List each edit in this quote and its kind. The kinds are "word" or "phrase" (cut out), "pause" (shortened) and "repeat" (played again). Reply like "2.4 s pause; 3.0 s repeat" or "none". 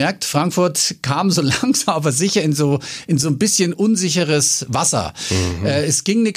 none